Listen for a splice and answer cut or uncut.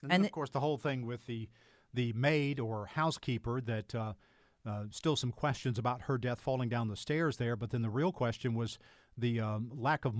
uncut